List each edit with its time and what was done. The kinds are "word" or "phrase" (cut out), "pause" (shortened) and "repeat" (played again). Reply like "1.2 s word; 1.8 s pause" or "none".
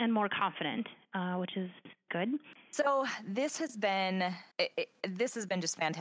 2.1 s word; 4.5 s pause